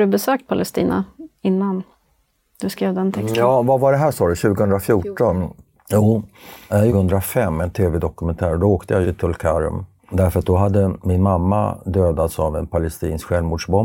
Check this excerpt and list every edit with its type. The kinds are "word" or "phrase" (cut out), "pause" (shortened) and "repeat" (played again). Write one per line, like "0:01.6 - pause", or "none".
0:06.9 - phrase
0:09.0 - word